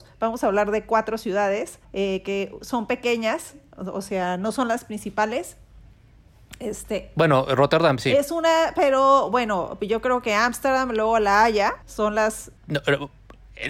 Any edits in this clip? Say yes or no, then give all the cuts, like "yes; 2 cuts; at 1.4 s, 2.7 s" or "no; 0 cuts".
yes; 3 cuts; at 1.8 s, 11.8 s, 12.6 s